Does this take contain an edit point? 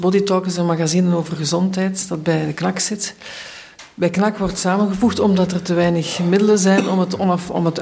no; 0 cuts

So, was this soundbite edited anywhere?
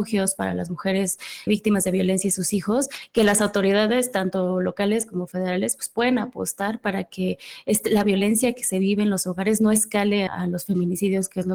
yes; 2 cuts; at 1.5 s, 10.3 s

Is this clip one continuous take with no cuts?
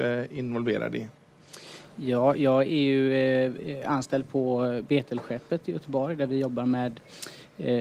yes; 0 cuts

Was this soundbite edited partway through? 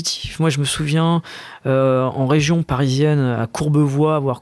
no; 0 cuts

